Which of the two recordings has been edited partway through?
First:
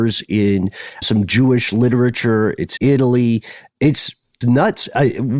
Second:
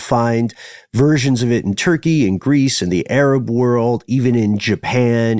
first; 3 cuts; at 1.0 s, 2.8 s, 4.4 s

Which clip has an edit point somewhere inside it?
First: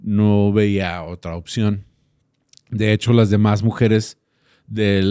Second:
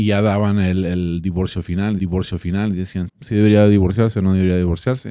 second; 2 cuts; at 2.0 s, 3.1 s

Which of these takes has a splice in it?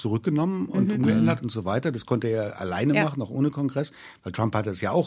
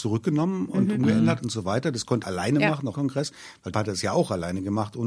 second; 3 cuts; at 2.2 s, 2.9 s, 3.7 s

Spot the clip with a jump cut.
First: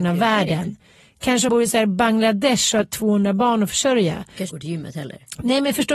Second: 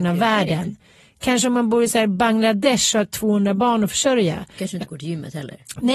first; 2 cuts; at 1.5 s, 4.5 s

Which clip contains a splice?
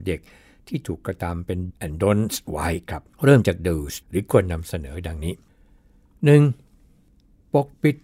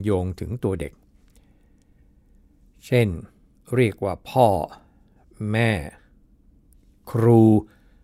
first; 3 cuts; at 1.7 s, 3.1 s, 4.0 s

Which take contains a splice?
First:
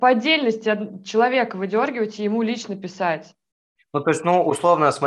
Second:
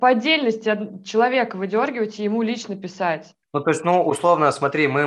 second; 1 cut; at 3.4 s

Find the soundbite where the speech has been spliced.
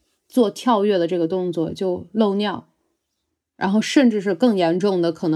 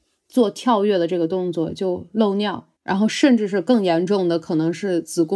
second; 1 cut; at 2.8 s

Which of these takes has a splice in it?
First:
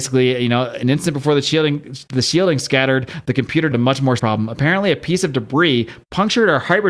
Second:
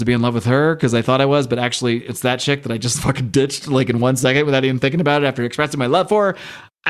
first; 2 cuts; at 3.7 s, 4.2 s

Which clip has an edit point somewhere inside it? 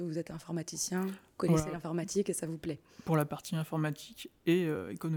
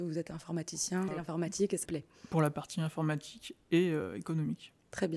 second; 2 cuts; at 1.1 s, 1.8 s

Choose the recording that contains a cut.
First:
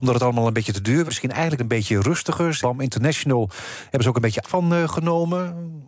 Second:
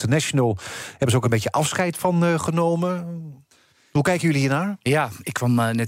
first; 4 cuts; at 1.1 s, 1.6 s, 2.6 s, 4.4 s

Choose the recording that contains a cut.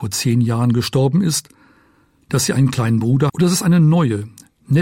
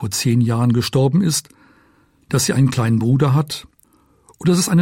first; 1 cut; at 3.3 s

